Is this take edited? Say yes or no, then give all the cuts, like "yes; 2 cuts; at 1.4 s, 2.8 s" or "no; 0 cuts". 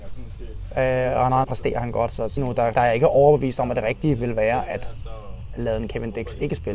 yes; 3 cuts; at 1.4 s, 2.4 s, 2.7 s